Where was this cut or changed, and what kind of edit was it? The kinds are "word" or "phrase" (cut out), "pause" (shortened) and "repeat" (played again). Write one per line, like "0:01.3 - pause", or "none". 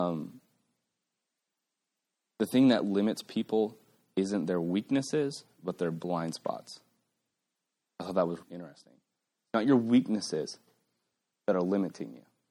0:08.4 - word